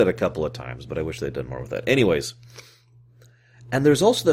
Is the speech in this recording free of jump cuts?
yes; 0 cuts

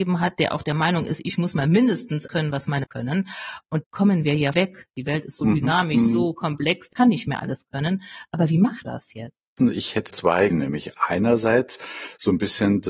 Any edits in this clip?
yes; 9 cuts; at 2.3 s, 2.8 s, 3.8 s, 4.5 s, 5.4 s, 6.9 s, 8.8 s, 10.1 s, 10.5 s

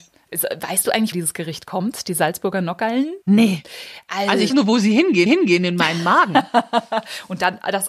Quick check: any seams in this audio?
yes; 4 cuts; at 1.1 s, 3.2 s, 4.5 s, 5.3 s

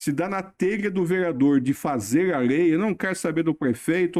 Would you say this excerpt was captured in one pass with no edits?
yes; 0 cuts

